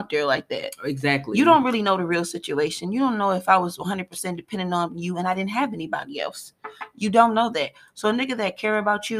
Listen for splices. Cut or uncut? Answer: uncut